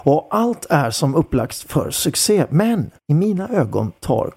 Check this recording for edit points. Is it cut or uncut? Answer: cut